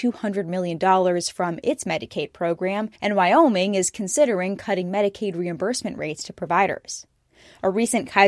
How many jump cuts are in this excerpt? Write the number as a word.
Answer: one